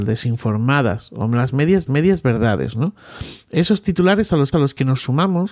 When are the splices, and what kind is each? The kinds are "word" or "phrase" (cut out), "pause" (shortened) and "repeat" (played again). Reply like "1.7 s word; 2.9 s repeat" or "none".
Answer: 1.9 s repeat; 4.5 s repeat

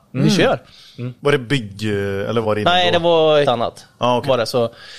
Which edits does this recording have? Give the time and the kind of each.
1.2 s pause; 2.4 s word; 3.4 s word

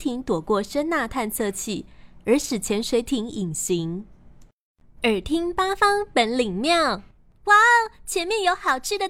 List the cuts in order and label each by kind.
7.2 s pause

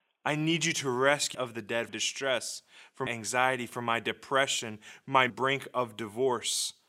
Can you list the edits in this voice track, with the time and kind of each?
1.3 s phrase; 1.9 s phrase; 3.1 s word; 5.3 s phrase

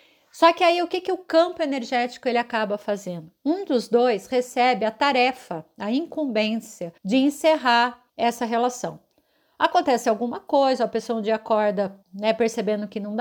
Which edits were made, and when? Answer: 7.0 s pause; 8.1 s pause; 12.0 s pause

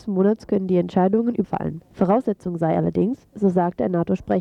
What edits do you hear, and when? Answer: 1.4 s phrase; 1.9 s pause

